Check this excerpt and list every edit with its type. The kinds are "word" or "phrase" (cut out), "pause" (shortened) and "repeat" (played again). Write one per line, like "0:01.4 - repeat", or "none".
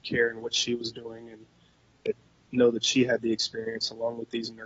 none